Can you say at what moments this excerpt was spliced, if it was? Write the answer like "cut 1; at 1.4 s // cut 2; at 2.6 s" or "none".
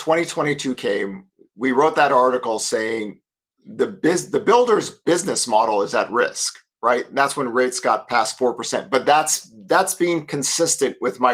none